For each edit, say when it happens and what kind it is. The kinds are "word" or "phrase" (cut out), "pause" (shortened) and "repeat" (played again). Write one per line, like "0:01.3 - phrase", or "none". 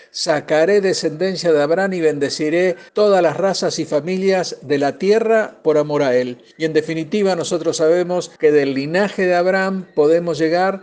0:02.9 - pause
0:06.5 - pause
0:08.4 - pause